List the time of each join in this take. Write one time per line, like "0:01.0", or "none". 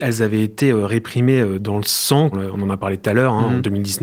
0:02.3